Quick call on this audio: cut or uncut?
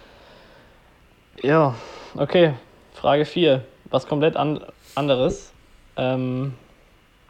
uncut